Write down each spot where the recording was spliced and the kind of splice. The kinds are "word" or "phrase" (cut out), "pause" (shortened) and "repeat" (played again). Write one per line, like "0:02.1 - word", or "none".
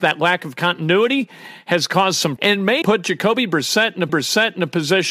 0:02.4 - word
0:02.8 - word
0:04.1 - repeat